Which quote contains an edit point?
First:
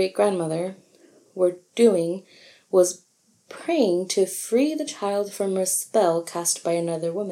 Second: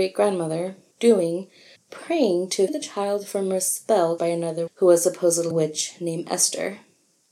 second; 6 cuts; at 0.9 s, 1.8 s, 2.7 s, 4.2 s, 4.7 s, 5.5 s

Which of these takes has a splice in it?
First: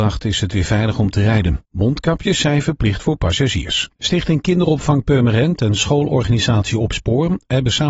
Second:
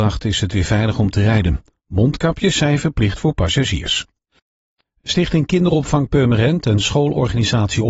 first; 2 cuts; at 1.6 s, 3.9 s

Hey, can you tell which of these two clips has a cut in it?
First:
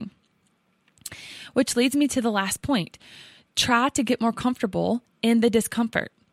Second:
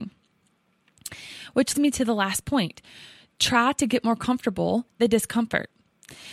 second; 2 cuts; at 1.7 s, 5.0 s

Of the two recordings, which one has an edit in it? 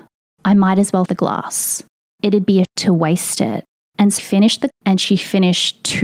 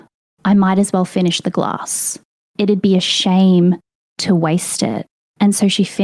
first; 4 cuts; at 1.1 s, 2.6 s, 4.2 s, 4.7 s

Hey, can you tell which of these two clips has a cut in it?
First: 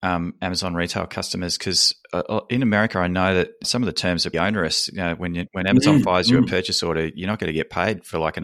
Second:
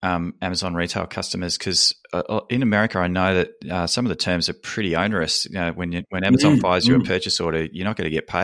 first; 2 cuts; at 3.6 s, 4.3 s

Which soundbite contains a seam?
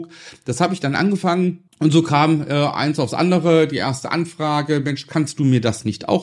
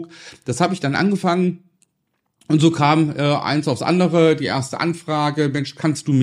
first; 1 cut; at 1.7 s

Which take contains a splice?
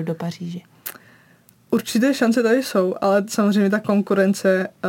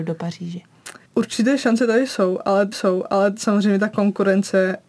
second; 2 cuts; at 1.1 s, 2.7 s

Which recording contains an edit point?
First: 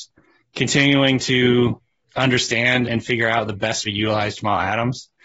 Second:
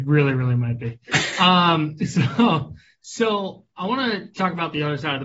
first; 2 cuts; at 2.9 s, 3.9 s

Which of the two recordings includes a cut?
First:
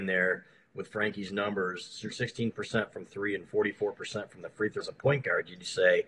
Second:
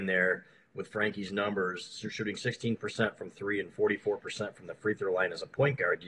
first; 2 cuts; at 2.1 s, 4.8 s

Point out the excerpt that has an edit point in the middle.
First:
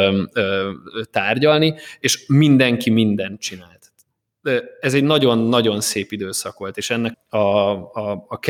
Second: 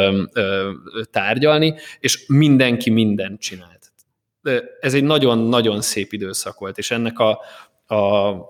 first; 1 cut; at 7.1 s

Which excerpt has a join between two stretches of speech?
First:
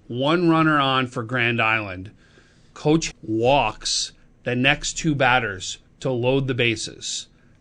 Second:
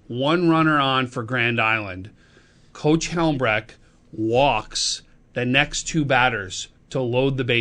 first; 1 cut; at 3.1 s

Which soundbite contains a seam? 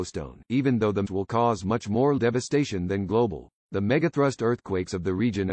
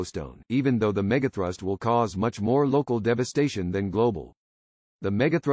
first; 3 cuts; at 1.0 s, 2.2 s, 3.6 s

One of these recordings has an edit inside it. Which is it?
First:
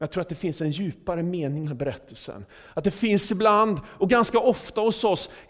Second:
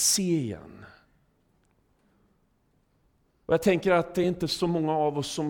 first; 1 cut; at 1.6 s

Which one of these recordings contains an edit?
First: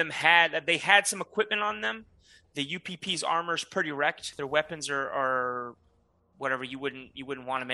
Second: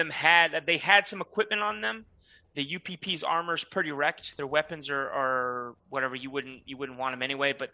second; 1 cut; at 5.8 s

